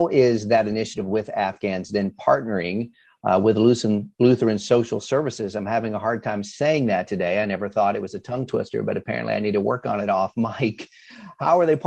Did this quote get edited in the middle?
no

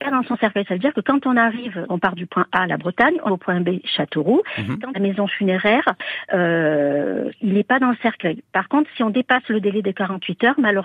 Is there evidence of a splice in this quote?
yes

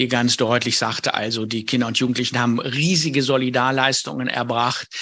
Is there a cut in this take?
no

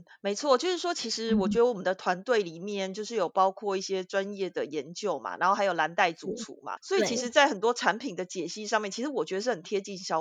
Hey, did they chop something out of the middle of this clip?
yes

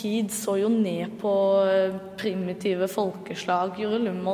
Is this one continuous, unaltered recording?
yes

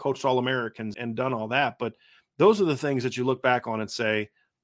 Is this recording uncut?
no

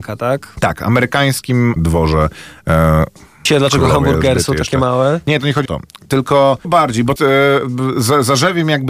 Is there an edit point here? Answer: yes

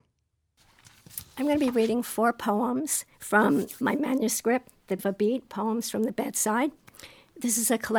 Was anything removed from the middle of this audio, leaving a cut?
yes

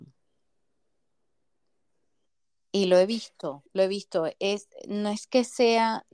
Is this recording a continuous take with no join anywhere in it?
no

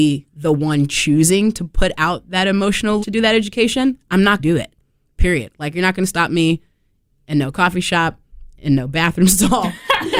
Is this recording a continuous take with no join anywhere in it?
no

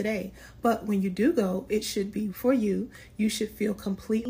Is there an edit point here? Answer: yes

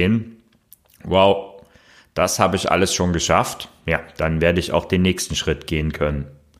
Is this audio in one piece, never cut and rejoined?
yes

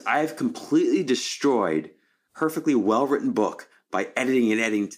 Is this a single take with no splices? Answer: yes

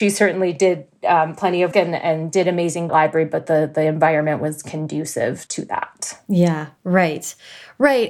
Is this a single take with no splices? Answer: no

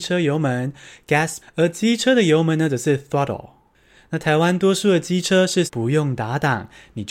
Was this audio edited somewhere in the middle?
yes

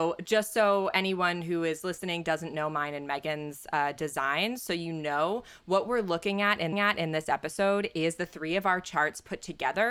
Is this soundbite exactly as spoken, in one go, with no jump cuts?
no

